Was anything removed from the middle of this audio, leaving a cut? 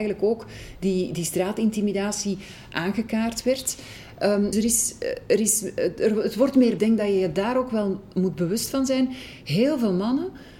yes; 2 cuts; at 4.5 s, 6.8 s

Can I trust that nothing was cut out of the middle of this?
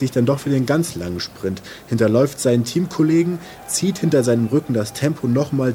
yes; 0 cuts

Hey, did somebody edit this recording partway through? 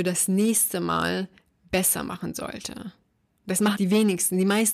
yes; 1 cut; at 3.7 s

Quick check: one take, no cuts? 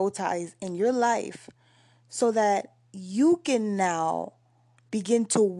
yes; 0 cuts

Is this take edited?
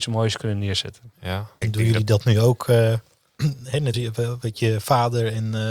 yes; 2 cuts; at 1.6 s, 3.9 s

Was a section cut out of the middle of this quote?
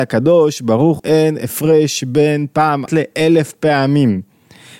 yes; 2 cuts; at 1.0 s, 2.9 s

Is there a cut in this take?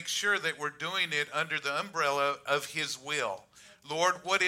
no; 0 cuts

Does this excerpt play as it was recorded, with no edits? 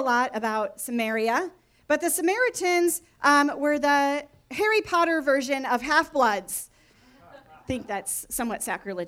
yes; 0 cuts

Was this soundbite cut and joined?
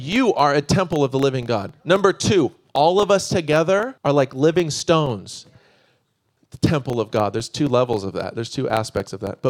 yes; 1 cut; at 4.0 s

